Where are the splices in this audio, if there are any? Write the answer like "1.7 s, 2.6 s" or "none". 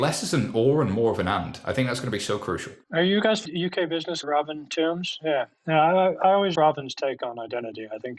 2.8 s, 3.4 s, 4.2 s, 6.5 s